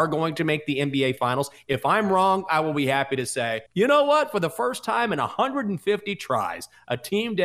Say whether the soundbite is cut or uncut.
cut